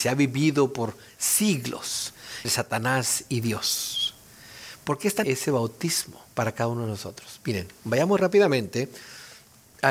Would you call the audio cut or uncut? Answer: cut